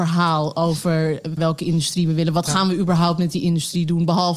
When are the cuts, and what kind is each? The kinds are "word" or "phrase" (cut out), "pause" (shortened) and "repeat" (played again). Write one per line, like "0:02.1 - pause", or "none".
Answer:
0:01.4 - word